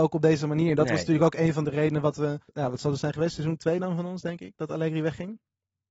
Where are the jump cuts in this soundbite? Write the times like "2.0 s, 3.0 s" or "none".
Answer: 2.5 s